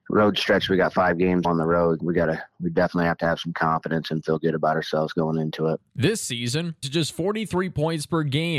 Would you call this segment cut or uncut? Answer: cut